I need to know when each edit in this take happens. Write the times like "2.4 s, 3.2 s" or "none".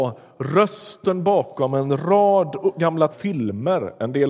3.1 s